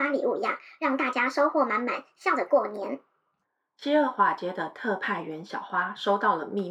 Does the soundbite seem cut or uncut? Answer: uncut